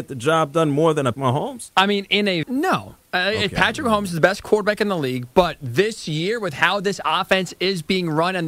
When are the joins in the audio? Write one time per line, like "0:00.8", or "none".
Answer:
0:01.1
0:02.4